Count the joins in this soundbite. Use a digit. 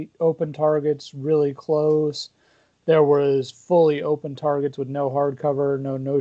0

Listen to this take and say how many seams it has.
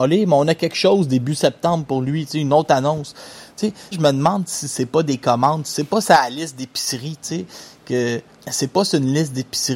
2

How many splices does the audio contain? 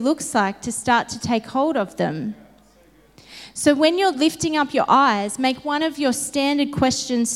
0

